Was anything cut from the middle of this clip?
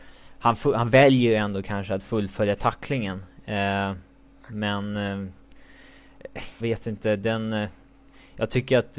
yes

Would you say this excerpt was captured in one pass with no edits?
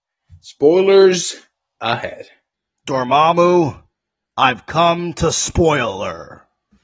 yes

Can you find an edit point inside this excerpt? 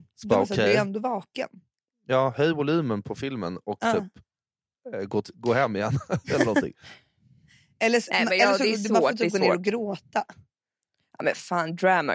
no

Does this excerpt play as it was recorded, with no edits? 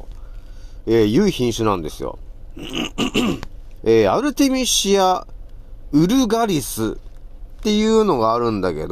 no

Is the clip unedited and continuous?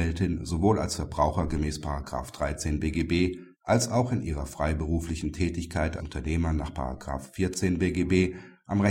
no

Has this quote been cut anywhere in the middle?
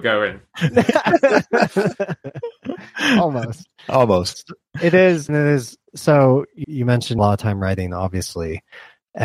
yes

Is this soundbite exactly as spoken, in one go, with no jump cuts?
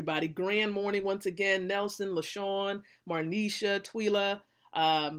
yes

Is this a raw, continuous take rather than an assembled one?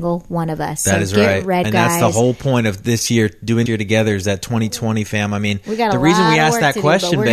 no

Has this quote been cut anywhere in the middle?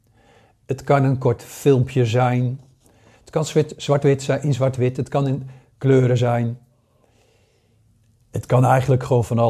no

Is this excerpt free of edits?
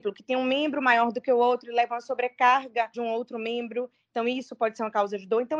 no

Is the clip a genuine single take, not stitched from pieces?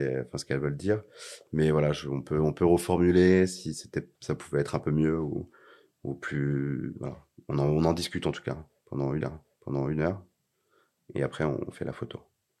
no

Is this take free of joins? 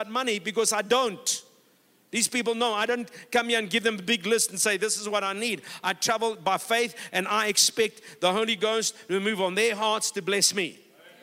yes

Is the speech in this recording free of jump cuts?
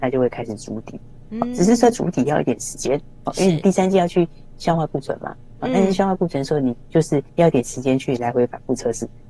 no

